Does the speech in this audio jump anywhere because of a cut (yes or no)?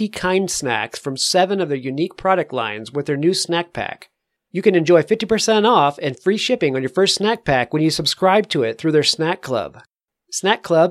no